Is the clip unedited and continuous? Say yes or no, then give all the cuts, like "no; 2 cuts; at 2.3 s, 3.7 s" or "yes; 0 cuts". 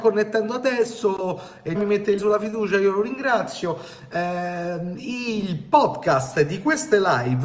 no; 2 cuts; at 1.7 s, 2.2 s